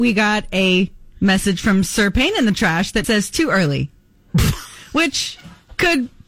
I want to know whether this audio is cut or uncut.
cut